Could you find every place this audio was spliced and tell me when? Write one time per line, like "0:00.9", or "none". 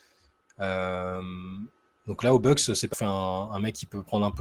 0:02.9